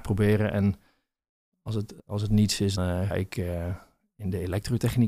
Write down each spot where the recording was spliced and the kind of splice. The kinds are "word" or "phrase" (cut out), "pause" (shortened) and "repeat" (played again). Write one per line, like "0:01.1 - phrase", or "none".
0:02.0 - pause
0:02.8 - word
0:03.1 - word